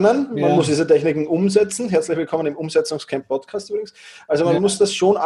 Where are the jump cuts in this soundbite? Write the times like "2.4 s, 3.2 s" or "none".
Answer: none